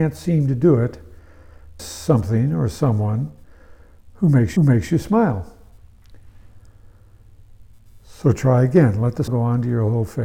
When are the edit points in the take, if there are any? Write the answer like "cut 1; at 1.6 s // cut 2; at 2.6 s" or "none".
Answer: cut 1; at 1.8 s // cut 2; at 4.6 s // cut 3; at 9.3 s